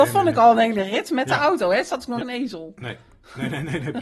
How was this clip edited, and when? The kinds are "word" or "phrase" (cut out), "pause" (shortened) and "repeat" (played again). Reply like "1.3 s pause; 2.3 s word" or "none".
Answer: 2.2 s phrase